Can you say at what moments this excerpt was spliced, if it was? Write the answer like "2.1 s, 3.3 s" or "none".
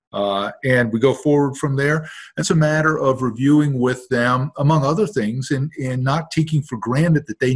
2.4 s

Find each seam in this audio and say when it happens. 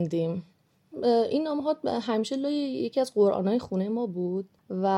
none

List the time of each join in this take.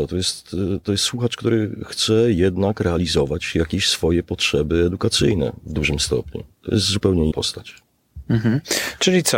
7.3 s

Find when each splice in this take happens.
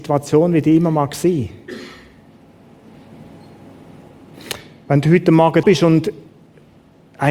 5.6 s

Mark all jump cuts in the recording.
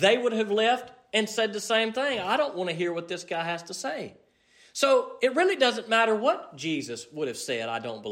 none

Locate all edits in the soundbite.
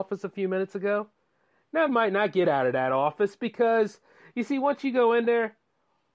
1.9 s

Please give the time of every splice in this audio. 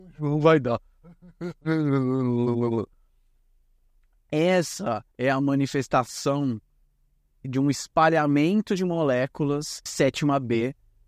5.1 s, 7.4 s, 9.9 s

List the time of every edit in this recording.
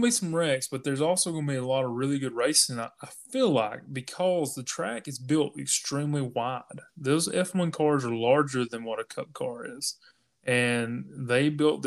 none

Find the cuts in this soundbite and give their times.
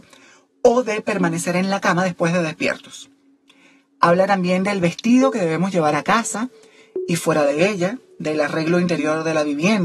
5.9 s

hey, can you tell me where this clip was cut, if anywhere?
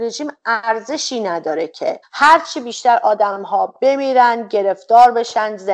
2.0 s

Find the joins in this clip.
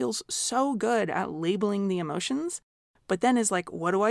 none

